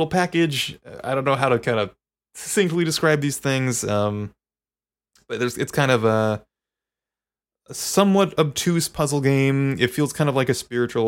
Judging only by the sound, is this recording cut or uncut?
uncut